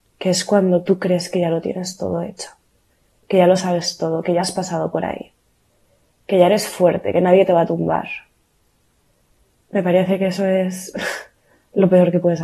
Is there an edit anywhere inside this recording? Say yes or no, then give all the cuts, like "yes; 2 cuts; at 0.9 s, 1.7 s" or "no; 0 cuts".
no; 0 cuts